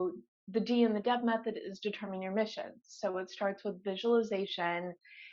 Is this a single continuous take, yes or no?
yes